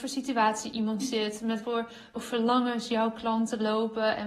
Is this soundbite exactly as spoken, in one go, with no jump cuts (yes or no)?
no